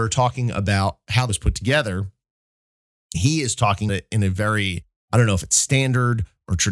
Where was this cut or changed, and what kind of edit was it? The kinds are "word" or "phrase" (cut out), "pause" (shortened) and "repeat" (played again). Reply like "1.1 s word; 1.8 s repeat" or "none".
1.3 s word; 3.1 s word; 3.9 s word; 4.9 s word